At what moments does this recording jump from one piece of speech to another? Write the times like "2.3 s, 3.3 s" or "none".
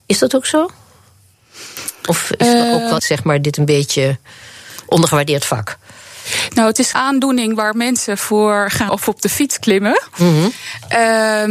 3.0 s, 6.9 s, 8.9 s

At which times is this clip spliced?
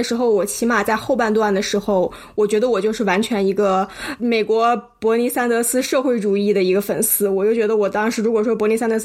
4.2 s

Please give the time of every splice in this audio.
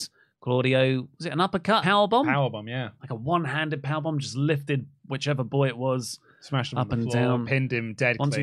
1.8 s

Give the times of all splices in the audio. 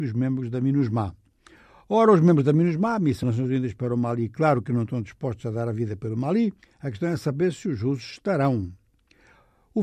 3.2 s, 6.6 s

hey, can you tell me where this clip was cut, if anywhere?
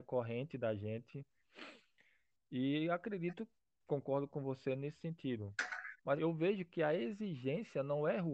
6.2 s

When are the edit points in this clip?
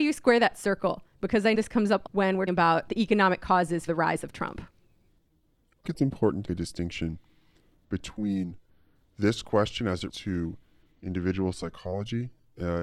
1.5 s, 2.1 s, 2.5 s, 2.9 s, 3.9 s, 5.8 s, 6.4 s, 10.1 s

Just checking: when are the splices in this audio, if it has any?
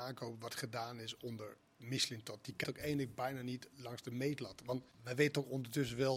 2.6 s, 3.7 s, 4.9 s

